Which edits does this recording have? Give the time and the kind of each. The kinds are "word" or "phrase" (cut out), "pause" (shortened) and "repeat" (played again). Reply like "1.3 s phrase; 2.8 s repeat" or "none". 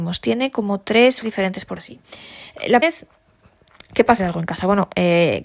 1.2 s word; 1.8 s word; 2.8 s word; 4.2 s phrase